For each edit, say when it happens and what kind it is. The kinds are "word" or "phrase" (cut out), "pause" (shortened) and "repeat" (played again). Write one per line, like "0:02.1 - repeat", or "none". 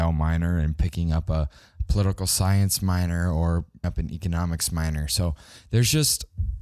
0:03.8 - word